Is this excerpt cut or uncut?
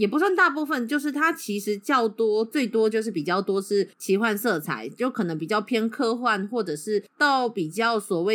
cut